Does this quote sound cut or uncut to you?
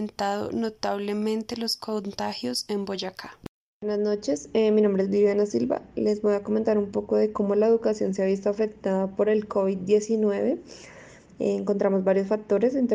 uncut